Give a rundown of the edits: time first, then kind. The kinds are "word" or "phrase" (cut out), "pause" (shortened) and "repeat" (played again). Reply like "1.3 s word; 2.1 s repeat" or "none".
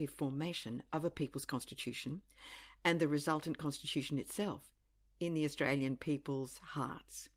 none